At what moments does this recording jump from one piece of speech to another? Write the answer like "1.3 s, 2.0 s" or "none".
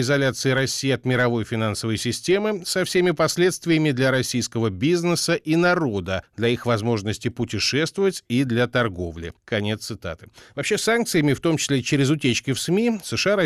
none